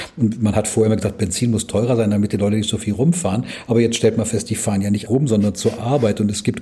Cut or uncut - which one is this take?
cut